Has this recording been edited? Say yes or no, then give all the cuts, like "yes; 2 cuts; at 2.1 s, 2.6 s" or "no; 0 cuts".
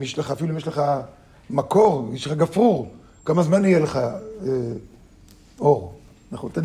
no; 0 cuts